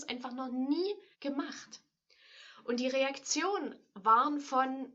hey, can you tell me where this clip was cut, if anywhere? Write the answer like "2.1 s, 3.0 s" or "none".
1.1 s